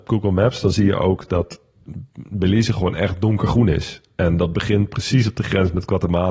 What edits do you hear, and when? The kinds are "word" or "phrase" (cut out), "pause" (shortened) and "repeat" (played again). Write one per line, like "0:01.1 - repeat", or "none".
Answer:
none